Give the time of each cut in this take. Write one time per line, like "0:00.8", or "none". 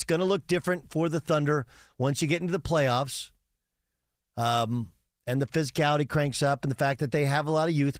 none